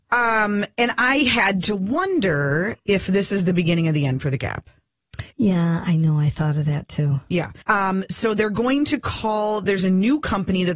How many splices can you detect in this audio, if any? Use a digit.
3